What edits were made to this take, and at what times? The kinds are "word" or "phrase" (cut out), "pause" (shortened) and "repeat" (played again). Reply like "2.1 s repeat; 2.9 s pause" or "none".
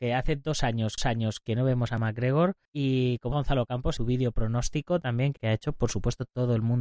1.0 s repeat; 2.6 s pause; 3.3 s word; 4.0 s phrase; 5.4 s word